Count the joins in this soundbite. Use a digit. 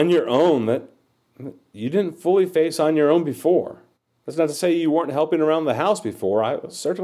1